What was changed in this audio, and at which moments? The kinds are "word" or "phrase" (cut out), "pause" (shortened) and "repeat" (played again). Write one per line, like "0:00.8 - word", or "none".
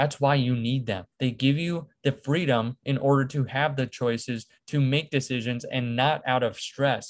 0:01.1 - pause